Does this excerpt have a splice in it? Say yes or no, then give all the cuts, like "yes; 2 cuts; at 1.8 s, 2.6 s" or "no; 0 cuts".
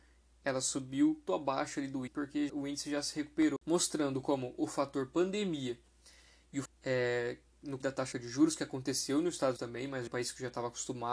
yes; 8 cuts; at 1.3 s, 2.1 s, 2.5 s, 6.7 s, 7.8 s, 8.1 s, 9.6 s, 10.1 s